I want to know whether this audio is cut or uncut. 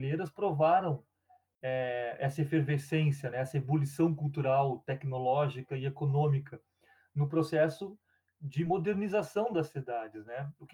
uncut